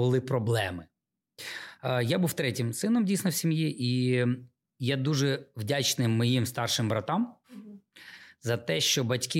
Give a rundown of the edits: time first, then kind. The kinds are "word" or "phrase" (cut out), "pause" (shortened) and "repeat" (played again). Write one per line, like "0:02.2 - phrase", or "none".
0:04.7 - pause
0:07.4 - pause